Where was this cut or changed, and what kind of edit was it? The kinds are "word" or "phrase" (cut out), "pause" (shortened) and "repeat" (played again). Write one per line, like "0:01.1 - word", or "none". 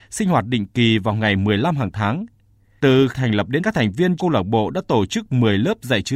0:03.1 - word
0:03.6 - word
0:04.2 - word